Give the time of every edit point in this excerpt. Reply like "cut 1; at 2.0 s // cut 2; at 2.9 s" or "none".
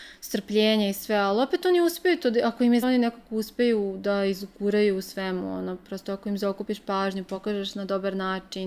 cut 1; at 2.8 s

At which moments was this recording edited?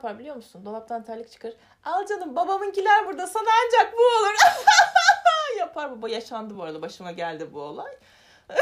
none

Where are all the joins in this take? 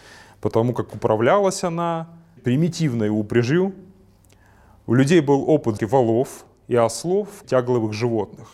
cut 1; at 2.4 s // cut 2; at 5.8 s // cut 3; at 7.4 s

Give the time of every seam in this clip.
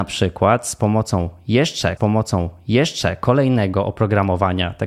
cut 1; at 2.0 s

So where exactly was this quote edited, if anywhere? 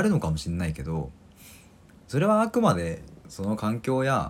none

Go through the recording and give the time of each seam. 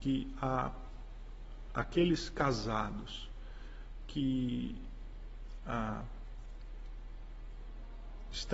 none

